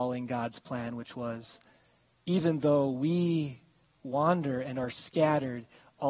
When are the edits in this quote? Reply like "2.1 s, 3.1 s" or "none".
none